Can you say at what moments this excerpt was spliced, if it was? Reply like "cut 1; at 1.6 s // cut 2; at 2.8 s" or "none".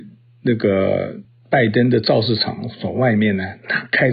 none